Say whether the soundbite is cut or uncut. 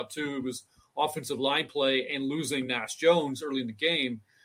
uncut